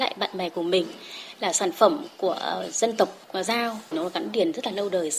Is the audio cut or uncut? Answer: cut